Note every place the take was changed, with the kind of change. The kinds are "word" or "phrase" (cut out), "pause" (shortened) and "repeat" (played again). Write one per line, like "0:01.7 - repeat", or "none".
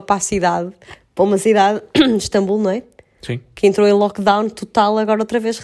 none